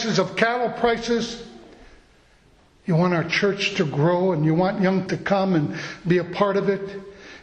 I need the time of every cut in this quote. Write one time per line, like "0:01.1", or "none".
0:05.1